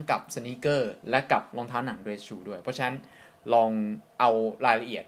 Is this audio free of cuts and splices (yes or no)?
no